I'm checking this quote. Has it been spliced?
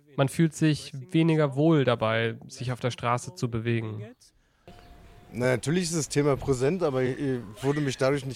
no; 0 cuts

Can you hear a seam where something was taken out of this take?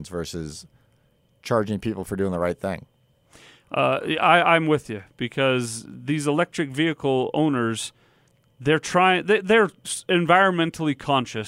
no; 0 cuts

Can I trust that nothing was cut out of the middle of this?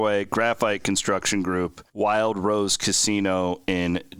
no; 1 cut; at 1.9 s

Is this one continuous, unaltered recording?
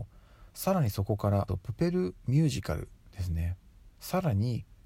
no; 2 cuts; at 1.5 s, 3.9 s

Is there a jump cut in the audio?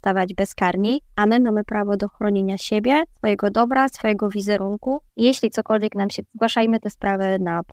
yes; 4 cuts; at 1.1 s, 3.1 s, 5.1 s, 6.2 s

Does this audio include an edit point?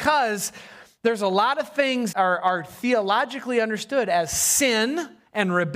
yes; 1 cut; at 2.1 s

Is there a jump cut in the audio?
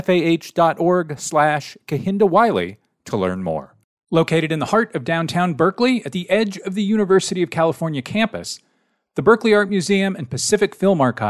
no; 0 cuts

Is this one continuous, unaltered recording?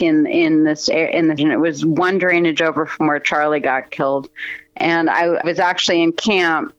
no; 3 cuts; at 1.4 s, 4.7 s, 5.4 s

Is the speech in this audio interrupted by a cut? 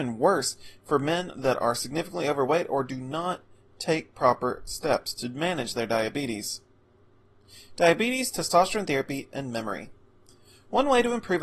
no; 0 cuts

